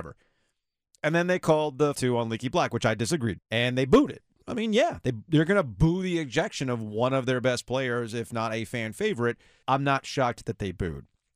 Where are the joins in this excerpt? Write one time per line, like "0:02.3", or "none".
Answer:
0:01.9
0:03.4
0:09.6